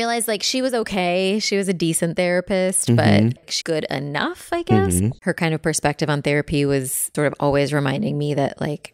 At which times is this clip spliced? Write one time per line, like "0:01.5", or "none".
0:03.6
0:07.1

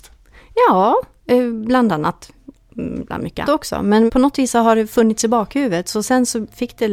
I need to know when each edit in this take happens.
0:03.4
0:04.1

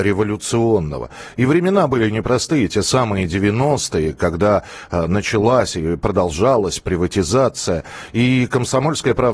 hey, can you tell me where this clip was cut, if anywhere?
none

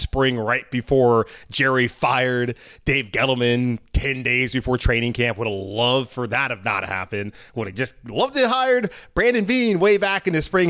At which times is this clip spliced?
none

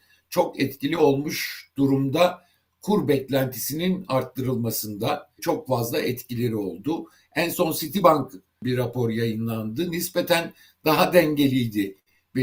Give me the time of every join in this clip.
none

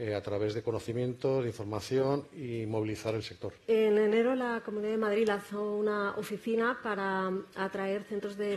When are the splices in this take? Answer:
0:03.6

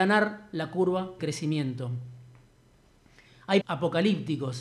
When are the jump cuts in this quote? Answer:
0:01.2
0:03.6

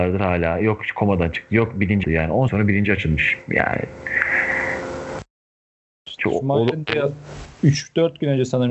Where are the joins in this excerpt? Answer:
0:02.0
0:02.5

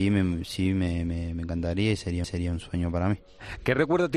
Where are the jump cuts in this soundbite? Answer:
0:02.2

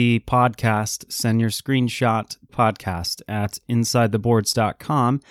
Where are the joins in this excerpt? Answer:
0:02.5

